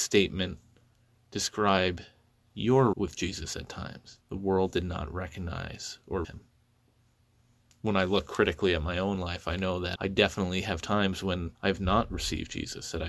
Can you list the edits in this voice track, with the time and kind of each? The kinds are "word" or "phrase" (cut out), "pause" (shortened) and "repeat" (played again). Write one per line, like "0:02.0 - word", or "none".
0:02.9 - word
0:04.2 - pause
0:06.2 - word
0:10.0 - word
0:11.5 - pause